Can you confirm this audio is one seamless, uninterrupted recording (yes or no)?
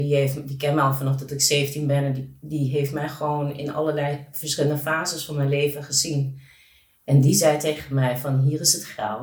yes